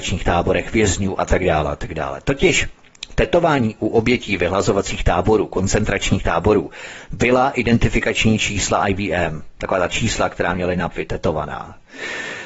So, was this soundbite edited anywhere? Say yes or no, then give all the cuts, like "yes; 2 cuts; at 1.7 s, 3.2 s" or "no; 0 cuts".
yes; 1 cut; at 10.9 s